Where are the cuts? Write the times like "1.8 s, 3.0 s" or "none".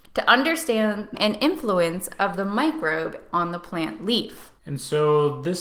1.1 s